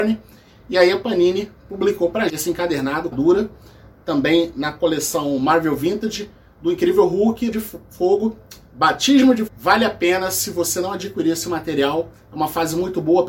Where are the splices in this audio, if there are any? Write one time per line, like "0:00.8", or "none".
0:02.3
0:03.1
0:07.5
0:09.5